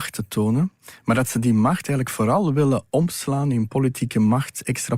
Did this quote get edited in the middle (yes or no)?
no